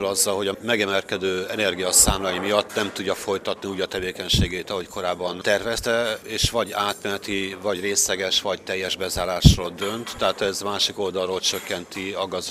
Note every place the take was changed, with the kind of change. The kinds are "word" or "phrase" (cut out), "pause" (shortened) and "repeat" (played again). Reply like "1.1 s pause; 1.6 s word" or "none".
none